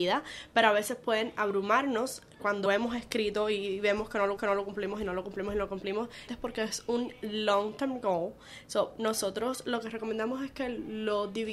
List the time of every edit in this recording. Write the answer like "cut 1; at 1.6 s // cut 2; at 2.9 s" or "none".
cut 1; at 2.7 s // cut 2; at 4.4 s // cut 3; at 6.3 s